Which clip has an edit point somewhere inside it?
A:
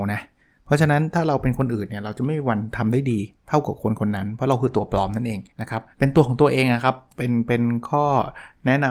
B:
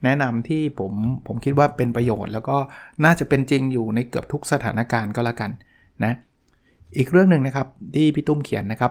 A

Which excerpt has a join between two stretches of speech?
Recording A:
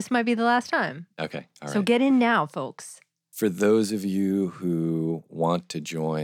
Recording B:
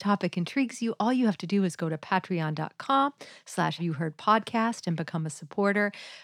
B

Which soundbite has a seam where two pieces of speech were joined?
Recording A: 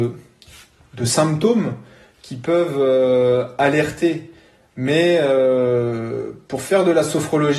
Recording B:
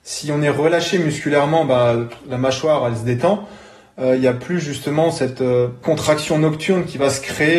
B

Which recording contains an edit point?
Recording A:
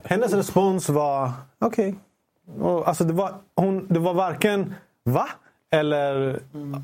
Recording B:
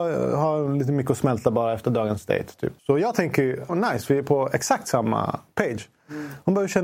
B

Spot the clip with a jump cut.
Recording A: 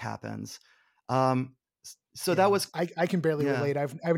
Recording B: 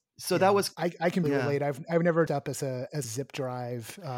B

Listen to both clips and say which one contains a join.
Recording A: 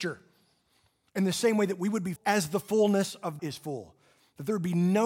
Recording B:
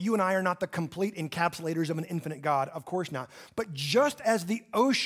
A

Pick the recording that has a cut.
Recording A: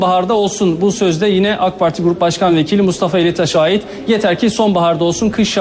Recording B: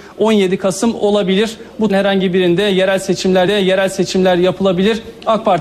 B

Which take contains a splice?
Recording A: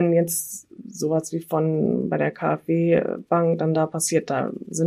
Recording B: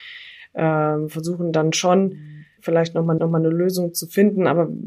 B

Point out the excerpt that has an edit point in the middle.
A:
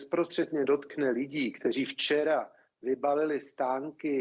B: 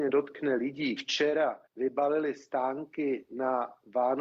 B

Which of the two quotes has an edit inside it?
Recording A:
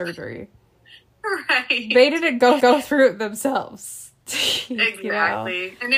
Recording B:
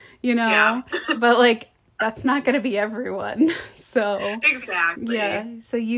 A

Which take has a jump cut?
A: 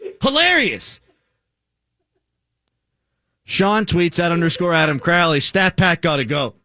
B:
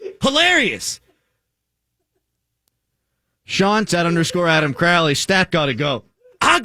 B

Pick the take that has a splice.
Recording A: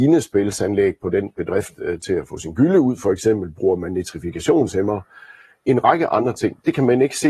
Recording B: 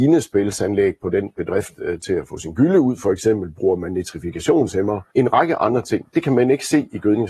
B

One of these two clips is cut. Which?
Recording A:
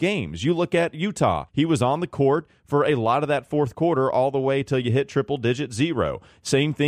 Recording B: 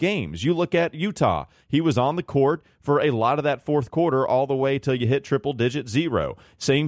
A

